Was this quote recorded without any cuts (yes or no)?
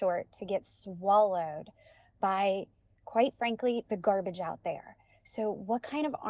yes